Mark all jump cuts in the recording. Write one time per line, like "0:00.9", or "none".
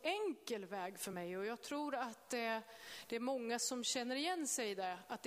none